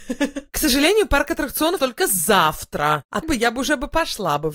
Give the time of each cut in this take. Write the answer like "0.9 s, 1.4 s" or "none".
1.8 s, 3.2 s